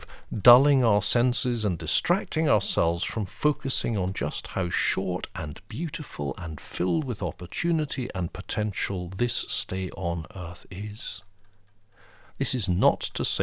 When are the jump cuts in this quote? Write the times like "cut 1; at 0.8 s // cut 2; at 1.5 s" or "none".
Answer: none